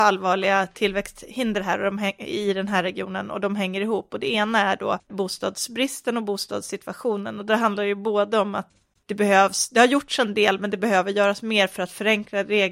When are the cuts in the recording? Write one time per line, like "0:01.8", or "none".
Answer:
0:05.0

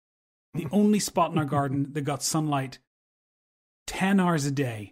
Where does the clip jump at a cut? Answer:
none

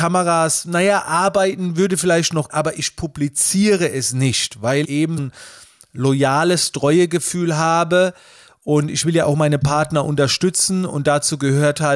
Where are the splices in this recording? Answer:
0:02.5
0:04.8
0:05.2

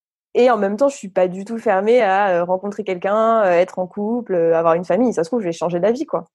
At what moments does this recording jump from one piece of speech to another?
none

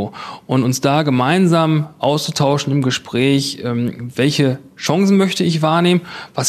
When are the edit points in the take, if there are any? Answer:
none

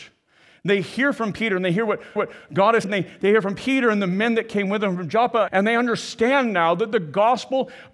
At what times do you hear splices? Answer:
0:02.2
0:02.8
0:05.5

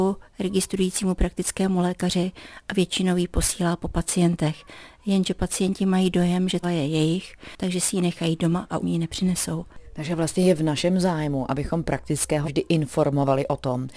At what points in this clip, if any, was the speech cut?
0:06.6
0:08.8
0:12.4

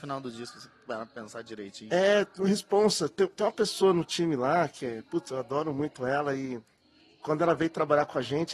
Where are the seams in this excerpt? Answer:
none

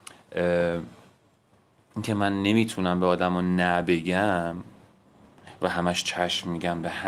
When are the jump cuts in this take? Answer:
none

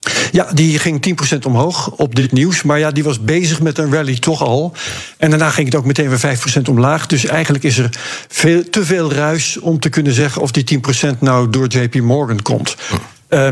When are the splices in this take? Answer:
none

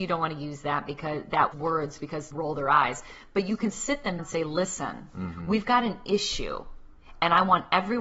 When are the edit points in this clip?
0:01.5
0:02.3
0:04.2

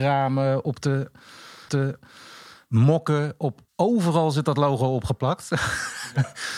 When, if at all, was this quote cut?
0:01.7
0:03.7

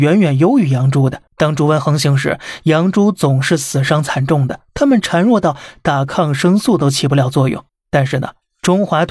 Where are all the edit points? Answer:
0:01.3
0:04.7
0:07.7

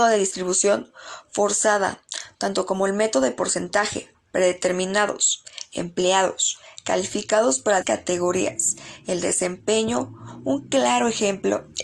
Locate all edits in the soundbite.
0:07.8

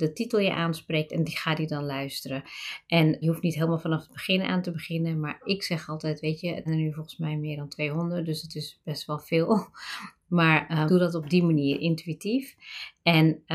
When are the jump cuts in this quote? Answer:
0:03.2
0:06.7
0:10.9

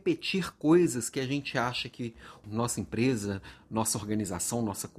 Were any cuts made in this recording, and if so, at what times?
0:02.4

